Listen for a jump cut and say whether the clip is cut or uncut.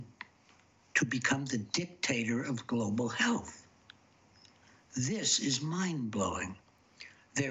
uncut